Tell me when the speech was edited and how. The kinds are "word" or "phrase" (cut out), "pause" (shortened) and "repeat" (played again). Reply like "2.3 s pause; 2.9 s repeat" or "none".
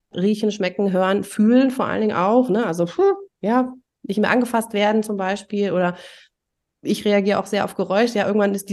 none